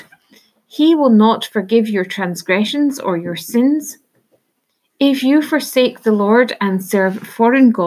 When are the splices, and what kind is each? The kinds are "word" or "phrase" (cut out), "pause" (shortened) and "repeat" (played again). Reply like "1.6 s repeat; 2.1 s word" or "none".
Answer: none